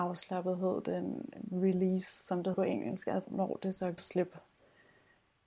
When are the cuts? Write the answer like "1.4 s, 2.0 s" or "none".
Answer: 2.5 s, 3.2 s, 4.0 s